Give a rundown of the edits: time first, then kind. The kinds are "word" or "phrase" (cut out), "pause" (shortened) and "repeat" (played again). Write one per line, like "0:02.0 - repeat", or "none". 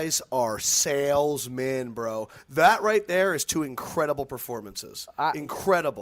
none